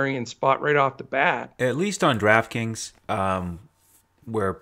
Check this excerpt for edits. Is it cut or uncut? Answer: cut